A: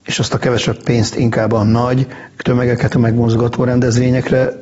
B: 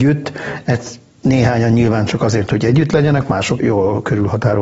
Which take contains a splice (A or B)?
B